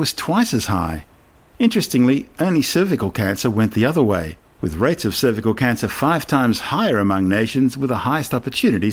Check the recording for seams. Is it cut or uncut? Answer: uncut